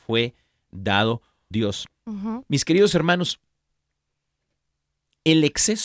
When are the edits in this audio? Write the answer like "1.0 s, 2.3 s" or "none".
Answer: 1.5 s